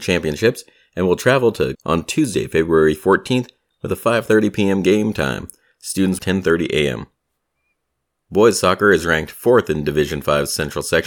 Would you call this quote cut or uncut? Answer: cut